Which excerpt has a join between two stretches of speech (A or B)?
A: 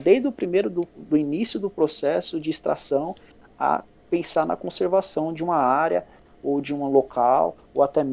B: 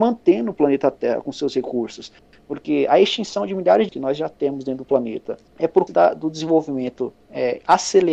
B